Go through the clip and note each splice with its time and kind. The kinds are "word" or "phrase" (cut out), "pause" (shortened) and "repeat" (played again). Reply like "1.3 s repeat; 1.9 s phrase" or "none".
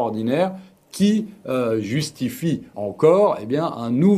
2.7 s word